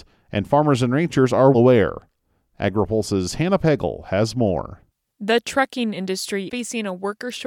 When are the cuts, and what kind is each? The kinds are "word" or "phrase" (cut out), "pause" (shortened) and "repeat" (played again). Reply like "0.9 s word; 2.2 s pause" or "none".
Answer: 1.5 s word; 6.5 s word